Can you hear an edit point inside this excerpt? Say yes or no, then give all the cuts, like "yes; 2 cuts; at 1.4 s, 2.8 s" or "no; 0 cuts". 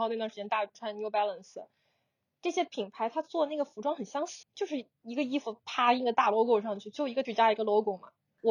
yes; 2 cuts; at 4.4 s, 7.2 s